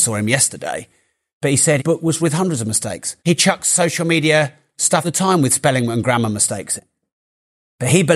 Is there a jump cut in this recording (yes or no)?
yes